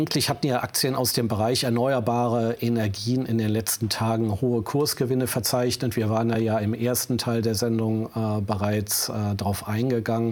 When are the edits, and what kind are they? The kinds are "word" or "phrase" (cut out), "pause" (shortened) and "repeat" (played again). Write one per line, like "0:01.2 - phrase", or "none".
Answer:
none

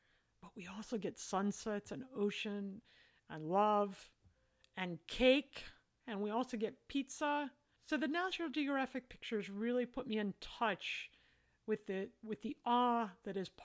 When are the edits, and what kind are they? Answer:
none

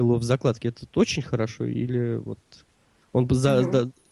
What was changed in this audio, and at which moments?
none

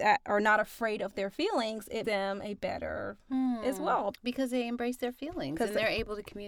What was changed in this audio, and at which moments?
0:02.0 - word
0:03.3 - word
0:04.1 - word

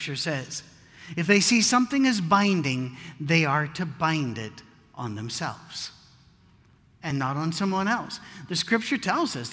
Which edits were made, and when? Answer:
none

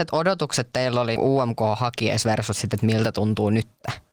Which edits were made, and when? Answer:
0:01.2 - word

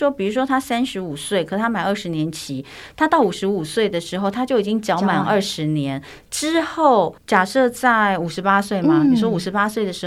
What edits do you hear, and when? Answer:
0:07.2 - pause

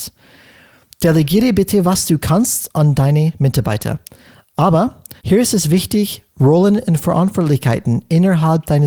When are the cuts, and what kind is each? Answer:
0:05.2 - pause

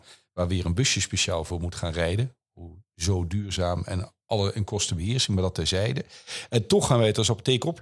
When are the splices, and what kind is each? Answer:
0:04.2 - pause

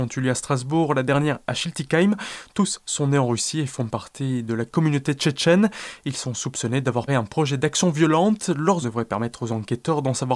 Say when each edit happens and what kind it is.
0:07.1 - word
0:08.8 - word

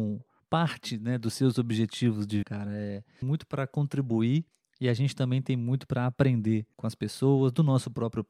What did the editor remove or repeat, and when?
0:02.4 - phrase
0:03.2 - phrase
0:04.5 - pause

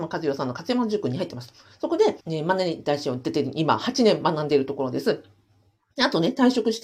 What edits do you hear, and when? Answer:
0:02.2 - pause

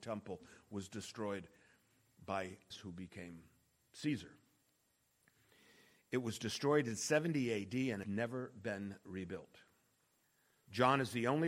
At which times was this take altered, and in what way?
0:02.7 - word
0:08.0 - word

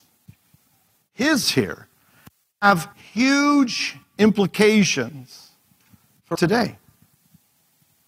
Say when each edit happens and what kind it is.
0:01.4 - word
0:02.9 - pause
0:06.3 - word

